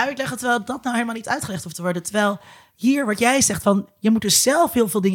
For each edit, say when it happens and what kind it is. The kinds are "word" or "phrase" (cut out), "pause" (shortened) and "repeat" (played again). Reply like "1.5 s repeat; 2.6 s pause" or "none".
none